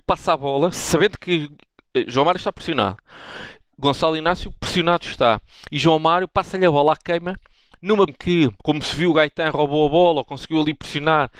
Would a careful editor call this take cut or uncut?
cut